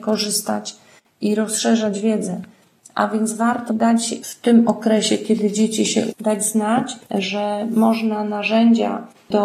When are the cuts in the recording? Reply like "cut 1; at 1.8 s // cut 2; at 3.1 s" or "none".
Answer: cut 1; at 3.7 s // cut 2; at 6.1 s // cut 3; at 7.0 s